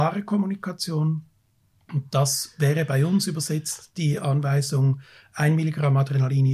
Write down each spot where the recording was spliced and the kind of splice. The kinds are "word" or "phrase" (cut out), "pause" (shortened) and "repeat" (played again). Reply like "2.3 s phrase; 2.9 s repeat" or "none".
none